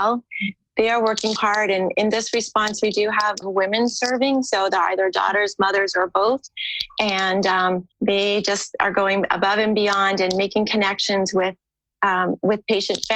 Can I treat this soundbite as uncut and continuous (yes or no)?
no